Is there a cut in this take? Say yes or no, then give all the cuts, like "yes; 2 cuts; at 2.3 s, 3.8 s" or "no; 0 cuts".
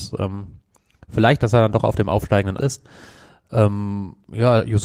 yes; 2 cuts; at 1.4 s, 2.6 s